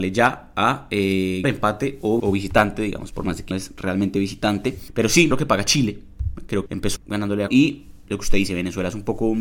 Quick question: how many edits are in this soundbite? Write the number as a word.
eight